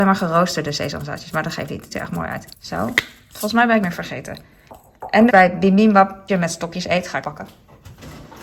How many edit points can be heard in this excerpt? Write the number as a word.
six